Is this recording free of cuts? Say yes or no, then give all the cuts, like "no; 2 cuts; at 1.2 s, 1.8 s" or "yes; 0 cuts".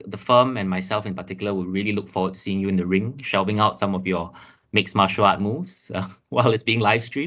yes; 0 cuts